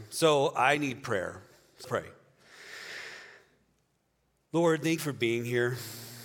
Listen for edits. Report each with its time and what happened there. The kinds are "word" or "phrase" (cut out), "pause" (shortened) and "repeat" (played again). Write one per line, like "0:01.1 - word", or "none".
0:01.8 - word
0:05.0 - word